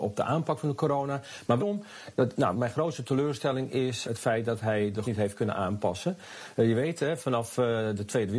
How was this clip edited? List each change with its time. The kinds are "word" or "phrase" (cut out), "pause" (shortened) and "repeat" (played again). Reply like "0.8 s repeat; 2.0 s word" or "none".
1.6 s phrase; 2.5 s phrase; 4.0 s word; 5.0 s word